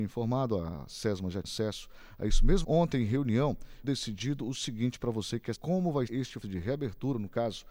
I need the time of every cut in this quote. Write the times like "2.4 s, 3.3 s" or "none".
1.4 s, 2.6 s, 3.8 s, 5.5 s, 6.1 s, 6.4 s